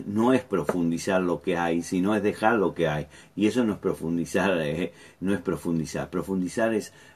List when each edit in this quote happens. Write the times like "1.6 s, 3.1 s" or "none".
none